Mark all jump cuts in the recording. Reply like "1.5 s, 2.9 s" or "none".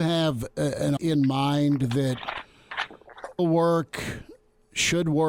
1.0 s, 3.4 s